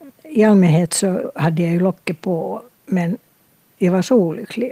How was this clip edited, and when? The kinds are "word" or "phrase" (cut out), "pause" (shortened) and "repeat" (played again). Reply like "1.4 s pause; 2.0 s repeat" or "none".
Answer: 2.7 s pause

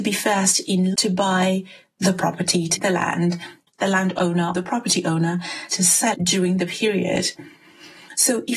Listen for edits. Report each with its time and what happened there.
0.9 s word; 2.8 s word; 3.7 s word; 4.5 s word; 5.7 s word; 6.1 s word; 6.7 s word

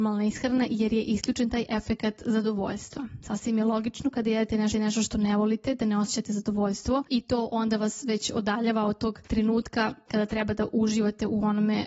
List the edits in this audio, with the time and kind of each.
4.7 s repeat

